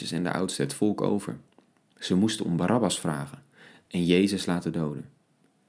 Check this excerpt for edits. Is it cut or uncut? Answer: uncut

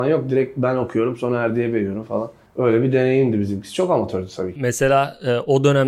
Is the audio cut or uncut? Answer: cut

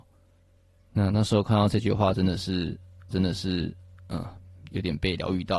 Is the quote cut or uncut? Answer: cut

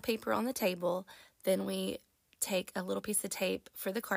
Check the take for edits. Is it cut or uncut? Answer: uncut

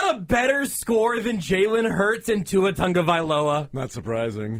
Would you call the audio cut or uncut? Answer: uncut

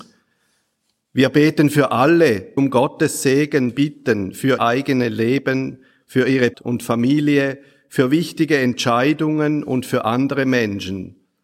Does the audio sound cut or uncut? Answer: cut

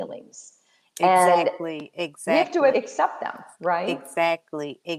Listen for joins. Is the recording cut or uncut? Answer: cut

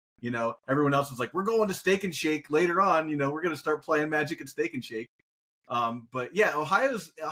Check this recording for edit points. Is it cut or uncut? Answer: uncut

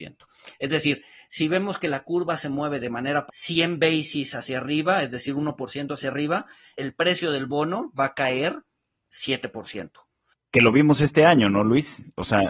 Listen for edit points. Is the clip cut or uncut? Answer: cut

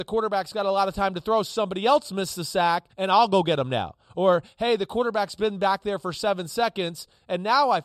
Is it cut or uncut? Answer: cut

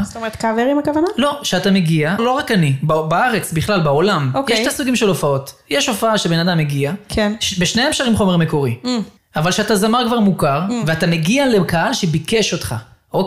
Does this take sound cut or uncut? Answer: cut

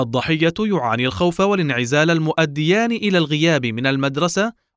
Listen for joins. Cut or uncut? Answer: uncut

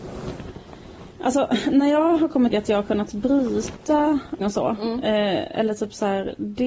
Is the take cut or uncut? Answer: cut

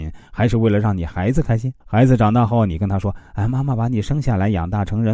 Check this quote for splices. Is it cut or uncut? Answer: cut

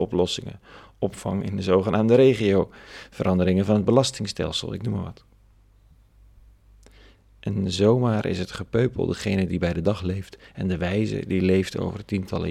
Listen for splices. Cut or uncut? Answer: uncut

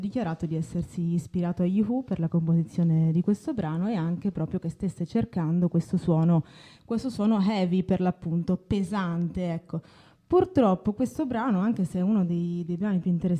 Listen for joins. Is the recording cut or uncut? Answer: uncut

